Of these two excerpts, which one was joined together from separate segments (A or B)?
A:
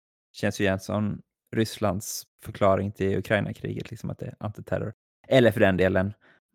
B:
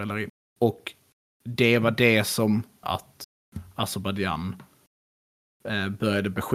B